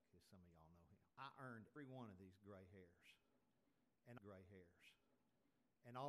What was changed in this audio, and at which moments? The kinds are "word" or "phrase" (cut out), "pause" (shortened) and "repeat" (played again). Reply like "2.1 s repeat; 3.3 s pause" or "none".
1.1 s pause; 1.8 s word; 4.2 s repeat